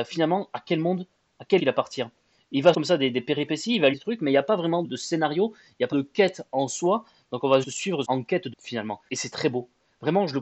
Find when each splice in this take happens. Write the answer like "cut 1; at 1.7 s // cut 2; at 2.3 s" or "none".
cut 1; at 1.6 s // cut 2; at 2.7 s // cut 3; at 3.9 s // cut 4; at 4.8 s // cut 5; at 5.9 s // cut 6; at 7.6 s // cut 7; at 8.0 s // cut 8; at 8.5 s